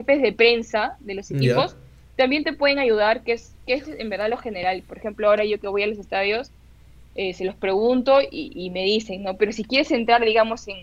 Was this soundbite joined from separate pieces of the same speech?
no; 0 cuts

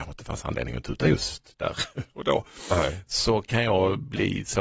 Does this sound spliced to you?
no; 0 cuts

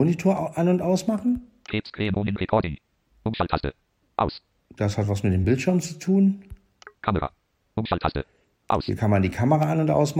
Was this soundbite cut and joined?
no; 0 cuts

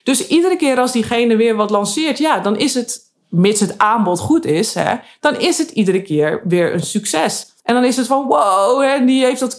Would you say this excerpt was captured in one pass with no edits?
no; 1 cut; at 7.6 s

